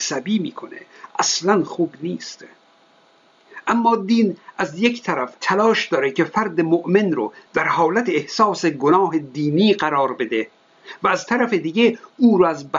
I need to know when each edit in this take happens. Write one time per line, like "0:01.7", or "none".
0:05.4